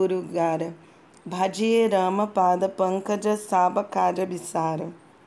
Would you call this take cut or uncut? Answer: uncut